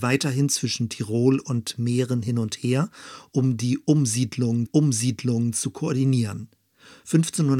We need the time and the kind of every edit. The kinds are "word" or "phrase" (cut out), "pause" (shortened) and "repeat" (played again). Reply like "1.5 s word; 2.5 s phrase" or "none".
4.7 s repeat

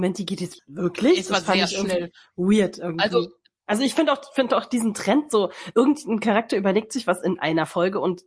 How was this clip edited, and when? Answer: none

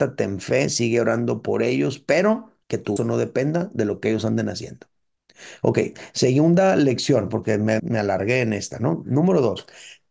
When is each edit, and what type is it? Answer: 2.6 s pause; 3.0 s word; 7.8 s word

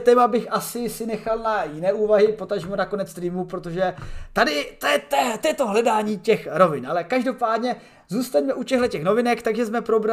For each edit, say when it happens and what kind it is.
none

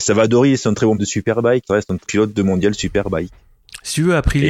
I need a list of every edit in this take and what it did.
1.0 s word; 1.7 s phrase; 2.1 s word

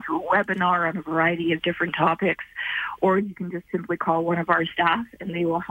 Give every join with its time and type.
none

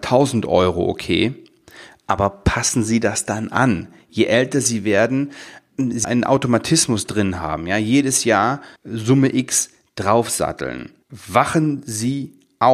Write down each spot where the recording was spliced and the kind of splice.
6.0 s word; 8.8 s pause; 11.0 s pause

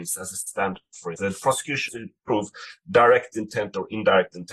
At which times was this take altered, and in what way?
1.1 s word; 1.9 s word

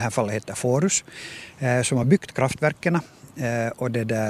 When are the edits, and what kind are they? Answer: none

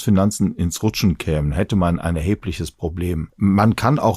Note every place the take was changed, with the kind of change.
none

